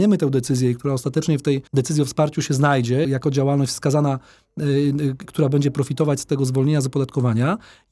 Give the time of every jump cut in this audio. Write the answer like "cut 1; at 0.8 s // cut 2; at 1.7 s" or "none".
cut 1; at 1.7 s // cut 2; at 3.0 s